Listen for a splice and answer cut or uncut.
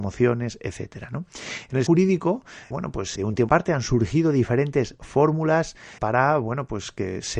cut